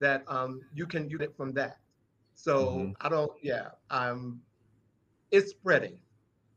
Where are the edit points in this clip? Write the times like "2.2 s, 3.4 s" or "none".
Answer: 1.2 s